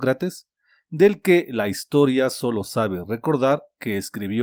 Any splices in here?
no; 0 cuts

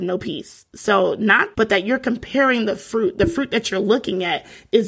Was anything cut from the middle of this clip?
yes; 1 cut; at 1.5 s

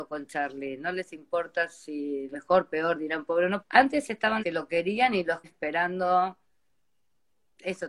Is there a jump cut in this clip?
yes; 4 cuts; at 2.3 s, 3.6 s, 4.4 s, 5.4 s

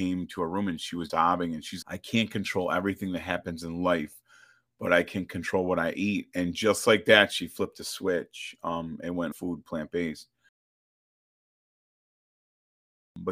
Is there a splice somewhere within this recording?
yes; 3 cuts; at 1.1 s, 1.8 s, 9.3 s

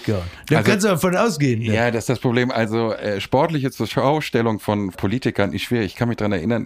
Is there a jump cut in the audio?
no; 0 cuts

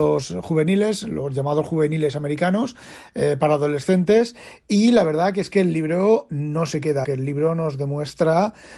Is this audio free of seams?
no; 1 cut; at 7.0 s

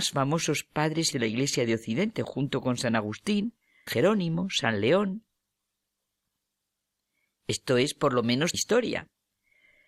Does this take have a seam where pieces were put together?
yes; 3 cuts; at 1.1 s, 3.9 s, 8.5 s

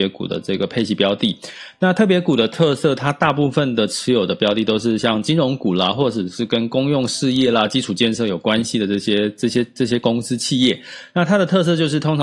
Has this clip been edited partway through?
no; 0 cuts

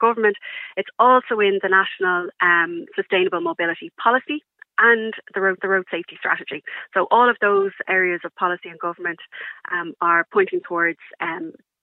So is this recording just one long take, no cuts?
no; 2 cuts; at 5.6 s, 7.8 s

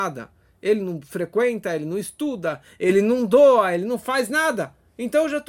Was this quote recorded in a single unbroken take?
yes; 0 cuts

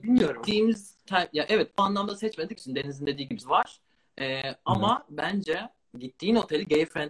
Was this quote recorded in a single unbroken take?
no; 5 cuts; at 1.1 s, 1.8 s, 2.6 s, 3.4 s, 5.9 s

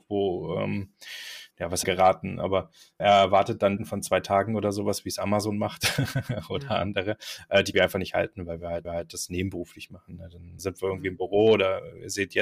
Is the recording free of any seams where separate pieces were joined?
no; 7 cuts; at 1.5 s, 1.8 s, 3.0 s, 3.8 s, 7.7 s, 8.8 s, 10.6 s

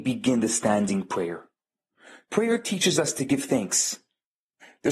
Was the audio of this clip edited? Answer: no; 0 cuts

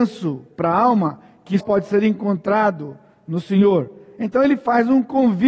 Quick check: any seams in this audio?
yes; 1 cut; at 1.6 s

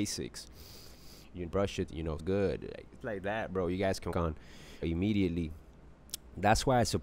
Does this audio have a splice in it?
yes; 6 cuts; at 1.5 s, 1.9 s, 2.2 s, 3.0 s, 4.1 s, 4.8 s

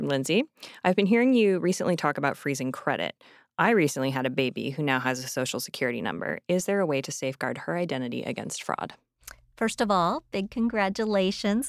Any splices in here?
no; 0 cuts

